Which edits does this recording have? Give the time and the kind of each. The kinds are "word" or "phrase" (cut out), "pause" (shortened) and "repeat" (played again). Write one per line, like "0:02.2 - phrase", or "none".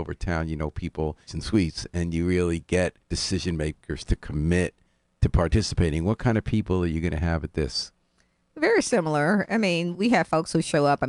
0:01.3 - phrase
0:03.0 - pause
0:09.9 - word